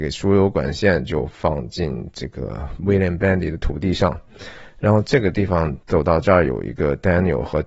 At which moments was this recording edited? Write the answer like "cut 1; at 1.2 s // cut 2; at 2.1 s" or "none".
cut 1; at 5.8 s